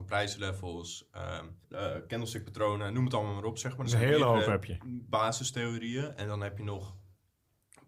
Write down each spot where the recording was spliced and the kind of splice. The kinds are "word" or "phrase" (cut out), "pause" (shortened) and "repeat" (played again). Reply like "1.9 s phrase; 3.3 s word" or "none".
1.6 s pause